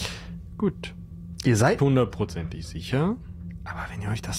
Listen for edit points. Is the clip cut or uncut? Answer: cut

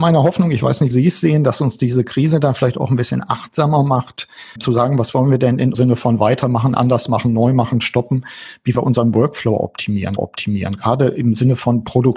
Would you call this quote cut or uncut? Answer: cut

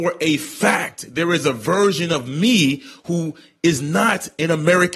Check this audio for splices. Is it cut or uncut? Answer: uncut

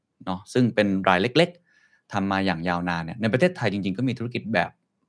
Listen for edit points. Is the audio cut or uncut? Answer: uncut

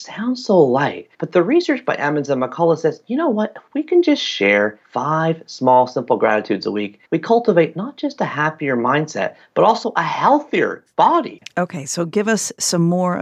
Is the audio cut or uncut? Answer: cut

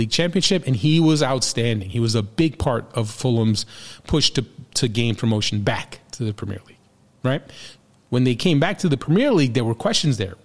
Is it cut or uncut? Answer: uncut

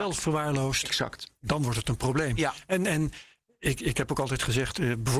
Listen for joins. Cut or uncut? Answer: uncut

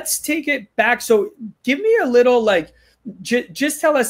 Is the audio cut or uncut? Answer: uncut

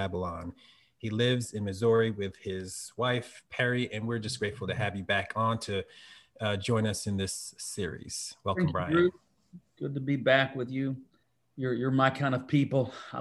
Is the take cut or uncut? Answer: cut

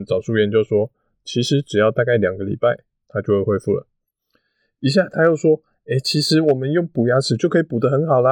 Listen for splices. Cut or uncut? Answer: uncut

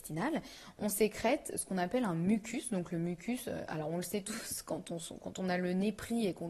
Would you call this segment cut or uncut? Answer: uncut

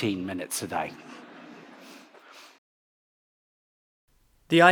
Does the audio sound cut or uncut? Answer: uncut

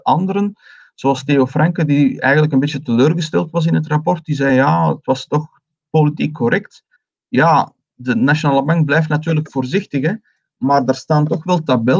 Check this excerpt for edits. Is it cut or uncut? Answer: uncut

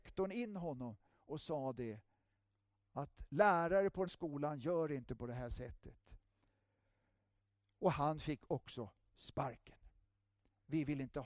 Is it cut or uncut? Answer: cut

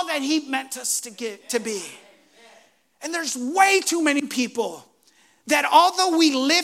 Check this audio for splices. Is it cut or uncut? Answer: uncut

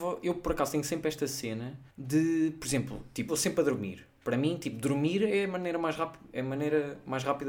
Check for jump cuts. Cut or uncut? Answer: cut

